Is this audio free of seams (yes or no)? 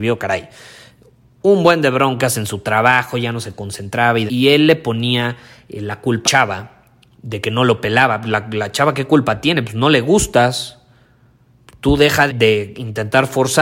no